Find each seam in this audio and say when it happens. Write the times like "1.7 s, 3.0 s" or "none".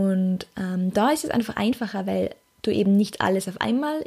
none